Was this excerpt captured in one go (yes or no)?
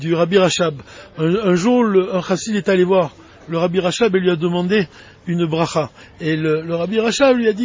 yes